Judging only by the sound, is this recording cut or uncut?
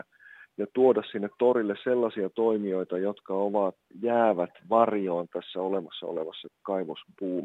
uncut